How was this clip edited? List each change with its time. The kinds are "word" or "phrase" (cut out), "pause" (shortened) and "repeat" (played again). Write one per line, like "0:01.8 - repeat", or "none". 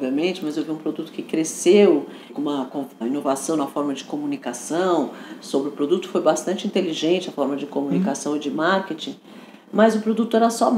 0:02.3 - word
0:03.0 - word